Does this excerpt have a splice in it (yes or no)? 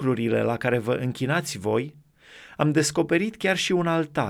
no